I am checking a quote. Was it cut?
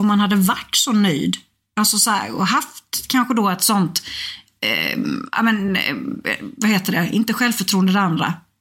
no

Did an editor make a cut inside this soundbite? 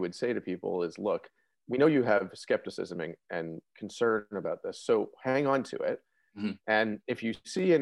no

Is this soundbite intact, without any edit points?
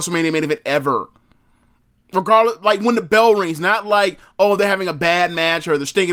yes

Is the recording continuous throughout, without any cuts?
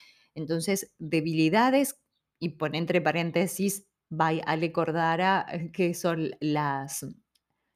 yes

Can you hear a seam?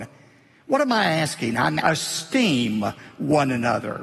yes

